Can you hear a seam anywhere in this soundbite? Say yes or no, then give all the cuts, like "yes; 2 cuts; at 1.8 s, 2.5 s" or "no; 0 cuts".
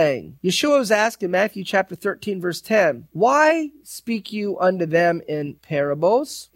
no; 0 cuts